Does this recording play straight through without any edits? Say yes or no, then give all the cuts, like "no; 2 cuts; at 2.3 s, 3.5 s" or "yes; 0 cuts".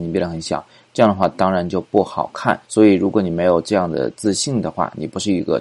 no; 1 cut; at 2.6 s